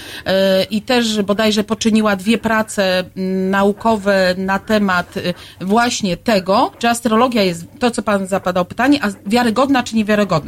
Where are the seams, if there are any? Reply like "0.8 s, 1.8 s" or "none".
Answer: 6.7 s

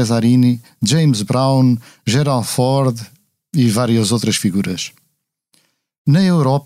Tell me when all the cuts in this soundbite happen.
none

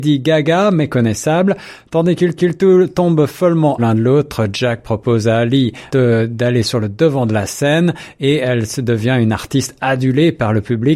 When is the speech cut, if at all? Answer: 2.4 s, 3.8 s, 5.9 s

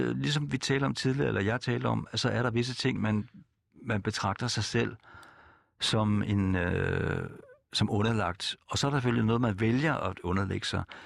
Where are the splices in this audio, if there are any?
3.0 s

